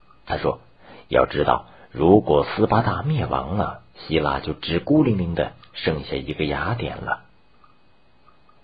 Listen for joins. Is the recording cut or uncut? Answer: uncut